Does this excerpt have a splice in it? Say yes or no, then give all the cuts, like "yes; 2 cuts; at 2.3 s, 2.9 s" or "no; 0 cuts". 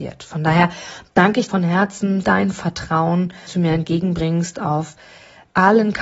yes; 3 cuts; at 1.5 s, 2.2 s, 3.5 s